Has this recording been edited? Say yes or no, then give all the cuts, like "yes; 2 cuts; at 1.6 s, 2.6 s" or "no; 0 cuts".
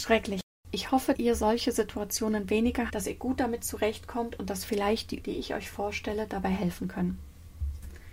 yes; 3 cuts; at 1.1 s, 2.9 s, 5.2 s